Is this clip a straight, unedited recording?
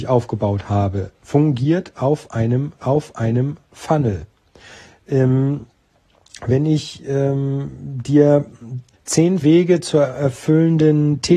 no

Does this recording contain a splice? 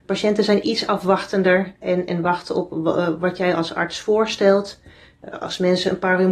no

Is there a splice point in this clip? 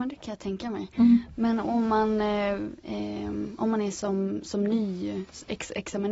no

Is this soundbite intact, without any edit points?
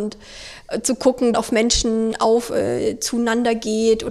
no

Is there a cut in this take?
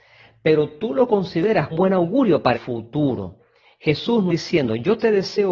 yes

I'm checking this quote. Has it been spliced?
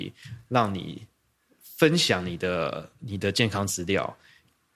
no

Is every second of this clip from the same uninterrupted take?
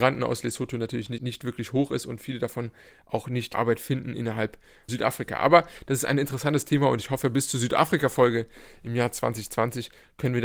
no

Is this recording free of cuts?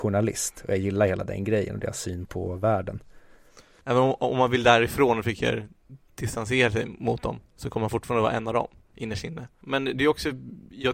yes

